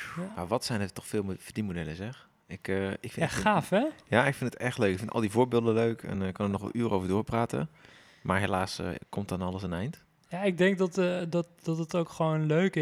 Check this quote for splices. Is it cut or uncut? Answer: uncut